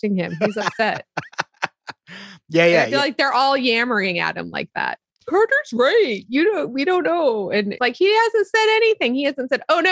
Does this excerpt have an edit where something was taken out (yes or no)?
yes